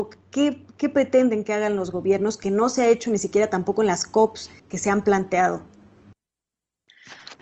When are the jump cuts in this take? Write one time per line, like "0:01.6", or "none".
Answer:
0:04.6